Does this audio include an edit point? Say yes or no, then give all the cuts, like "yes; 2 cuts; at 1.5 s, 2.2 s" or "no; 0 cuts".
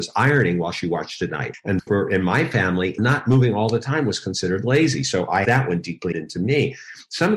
yes; 4 cuts; at 1.3 s, 1.9 s, 5.4 s, 6.1 s